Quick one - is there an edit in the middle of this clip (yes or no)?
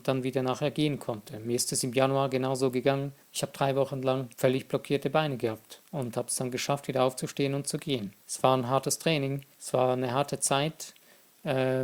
yes